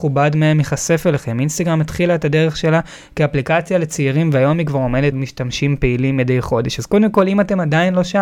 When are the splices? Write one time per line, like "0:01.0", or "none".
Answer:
0:05.1

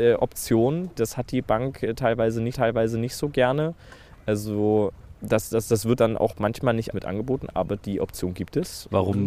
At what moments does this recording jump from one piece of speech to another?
0:01.0
0:02.5
0:05.2
0:06.0
0:06.9

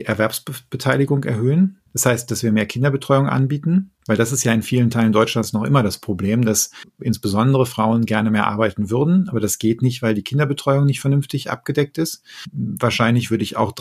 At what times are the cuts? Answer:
0:01.9
0:04.0

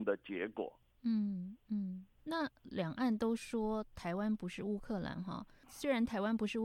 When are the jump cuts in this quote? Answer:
0:02.2

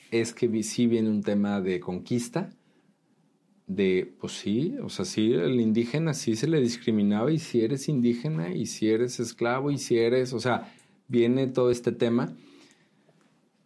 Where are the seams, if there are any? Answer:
none

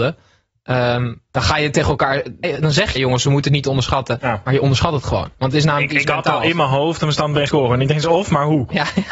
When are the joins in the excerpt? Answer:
0:01.3
0:02.4
0:03.0
0:07.0
0:07.5

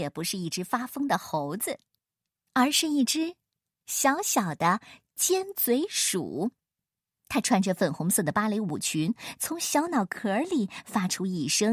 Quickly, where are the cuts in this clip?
none

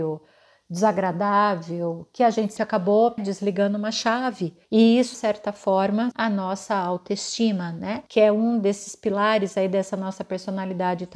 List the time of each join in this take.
0:02.6
0:03.2
0:04.6
0:05.1
0:06.1
0:08.1

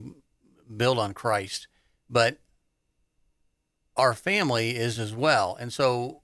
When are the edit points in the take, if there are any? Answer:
none

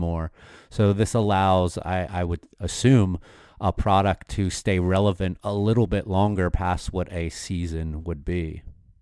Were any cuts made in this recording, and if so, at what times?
none

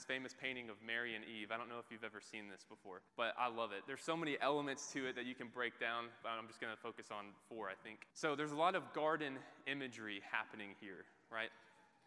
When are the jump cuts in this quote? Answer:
0:03.1
0:08.1

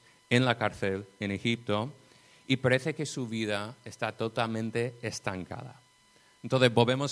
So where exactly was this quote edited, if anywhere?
none

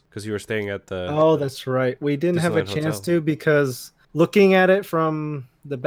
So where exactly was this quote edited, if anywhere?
none

